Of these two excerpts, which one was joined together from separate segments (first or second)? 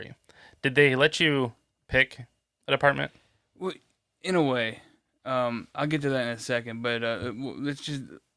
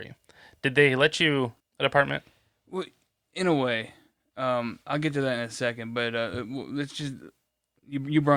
second